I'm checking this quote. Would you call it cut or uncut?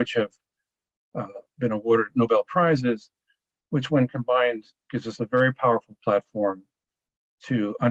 uncut